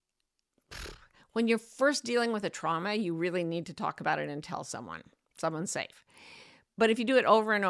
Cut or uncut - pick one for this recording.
uncut